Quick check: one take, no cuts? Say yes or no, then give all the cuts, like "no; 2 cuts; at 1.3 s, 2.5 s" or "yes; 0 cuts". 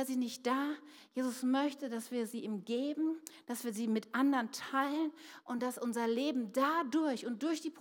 yes; 0 cuts